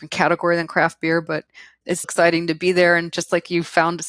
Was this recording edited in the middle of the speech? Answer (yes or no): yes